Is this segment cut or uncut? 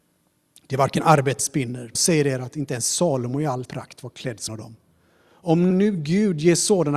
cut